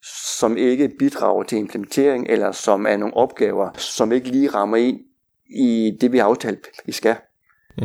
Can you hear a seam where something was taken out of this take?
no; 0 cuts

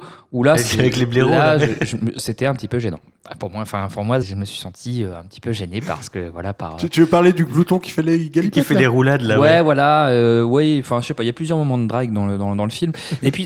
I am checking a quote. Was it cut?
yes; 1 cut; at 4.2 s

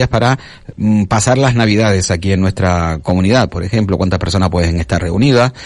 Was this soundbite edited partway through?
no; 0 cuts

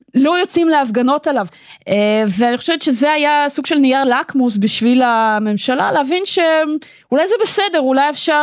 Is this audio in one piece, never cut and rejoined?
yes; 0 cuts

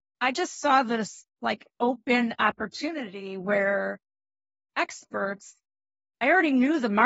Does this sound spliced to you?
no; 0 cuts

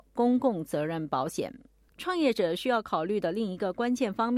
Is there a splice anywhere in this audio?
yes; 1 cut; at 1.8 s

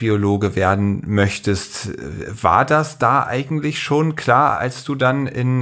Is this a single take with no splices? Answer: yes; 0 cuts

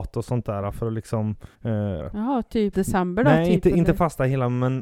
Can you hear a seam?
yes; 3 cuts; at 1.5 s, 2.0 s, 2.7 s

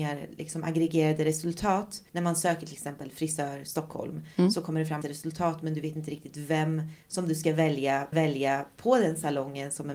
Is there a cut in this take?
yes; 3 cuts; at 2.1 s, 5.0 s, 8.1 s

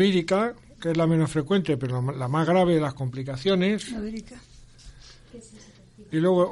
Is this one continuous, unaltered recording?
yes; 0 cuts

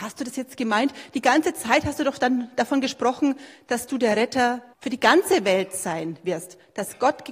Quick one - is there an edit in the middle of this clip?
yes; 1 cut; at 4.7 s

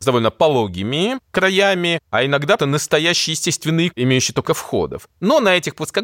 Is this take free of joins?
no; 3 cuts; at 2.6 s, 3.9 s, 4.5 s

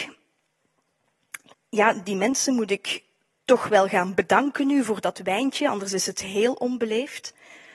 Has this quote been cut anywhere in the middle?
no; 0 cuts

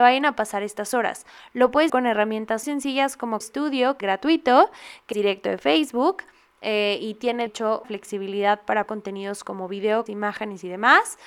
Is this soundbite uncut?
no; 9 cuts; at 1.9 s, 2.6 s, 3.4 s, 4.0 s, 5.1 s, 7.5 s, 7.8 s, 8.9 s, 10.1 s

